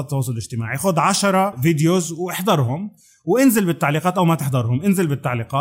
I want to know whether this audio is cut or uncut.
uncut